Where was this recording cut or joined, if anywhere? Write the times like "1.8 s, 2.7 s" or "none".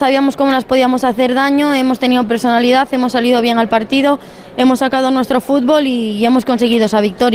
none